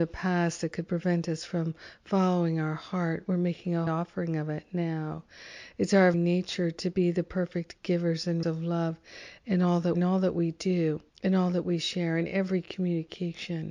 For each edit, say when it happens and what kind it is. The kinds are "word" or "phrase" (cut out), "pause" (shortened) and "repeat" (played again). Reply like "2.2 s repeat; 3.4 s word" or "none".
3.9 s word; 6.1 s word; 8.4 s word; 9.9 s phrase; 11.1 s pause